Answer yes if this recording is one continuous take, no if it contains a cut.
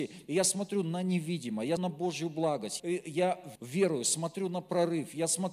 no